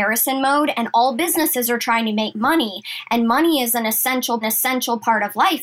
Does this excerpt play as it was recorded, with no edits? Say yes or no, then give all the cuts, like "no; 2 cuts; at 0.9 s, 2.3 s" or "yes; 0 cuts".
no; 1 cut; at 4.4 s